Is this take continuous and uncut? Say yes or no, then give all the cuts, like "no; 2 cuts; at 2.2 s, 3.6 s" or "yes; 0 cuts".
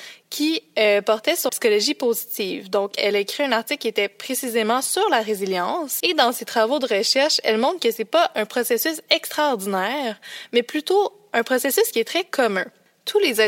no; 3 cuts; at 1.5 s, 3.0 s, 6.0 s